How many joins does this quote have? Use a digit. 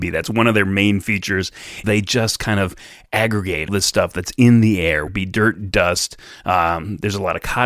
3